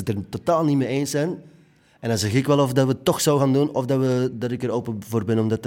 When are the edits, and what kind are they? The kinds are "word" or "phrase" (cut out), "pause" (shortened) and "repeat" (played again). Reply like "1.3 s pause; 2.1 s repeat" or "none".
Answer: none